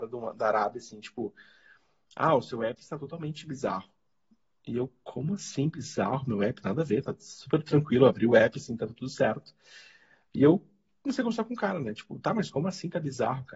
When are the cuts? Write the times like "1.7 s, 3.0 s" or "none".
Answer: none